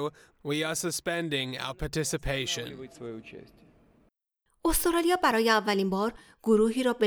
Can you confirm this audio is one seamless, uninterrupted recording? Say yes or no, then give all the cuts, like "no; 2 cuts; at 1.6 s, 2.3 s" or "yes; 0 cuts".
yes; 0 cuts